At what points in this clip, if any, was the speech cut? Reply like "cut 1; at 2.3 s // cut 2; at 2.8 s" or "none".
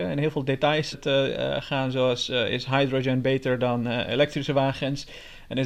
cut 1; at 0.9 s